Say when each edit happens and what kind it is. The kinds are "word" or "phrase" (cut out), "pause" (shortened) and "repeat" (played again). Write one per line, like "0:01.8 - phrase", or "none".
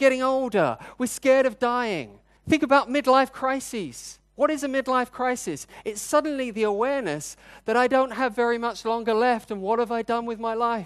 0:02.4 - pause

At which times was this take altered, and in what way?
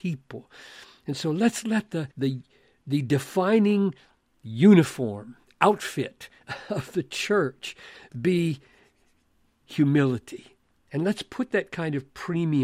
0:02.1 - pause
0:10.6 - pause

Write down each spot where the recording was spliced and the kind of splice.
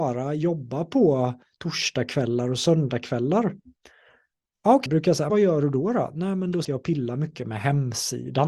0:04.9 - word
0:05.3 - word
0:06.6 - word

